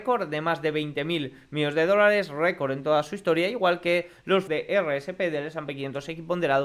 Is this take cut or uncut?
cut